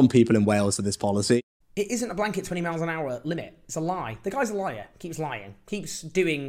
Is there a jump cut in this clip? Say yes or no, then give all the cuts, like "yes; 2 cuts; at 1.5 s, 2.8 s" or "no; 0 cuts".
no; 0 cuts